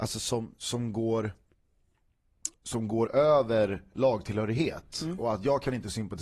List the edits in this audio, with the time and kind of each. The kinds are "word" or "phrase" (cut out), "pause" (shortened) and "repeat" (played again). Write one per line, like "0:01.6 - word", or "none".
0:02.6 - pause